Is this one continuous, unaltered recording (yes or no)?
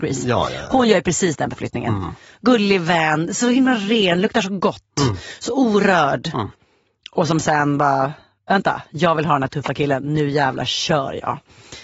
yes